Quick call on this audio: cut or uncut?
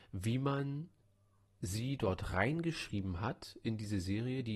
uncut